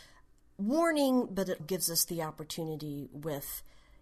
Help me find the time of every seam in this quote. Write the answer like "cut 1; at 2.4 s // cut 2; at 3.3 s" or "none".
cut 1; at 1.6 s